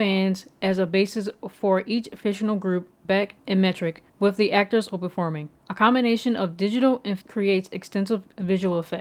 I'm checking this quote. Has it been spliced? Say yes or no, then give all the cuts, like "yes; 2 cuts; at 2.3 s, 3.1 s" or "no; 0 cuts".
yes; 6 cuts; at 3.0 s, 3.4 s, 4.1 s, 4.9 s, 5.6 s, 7.2 s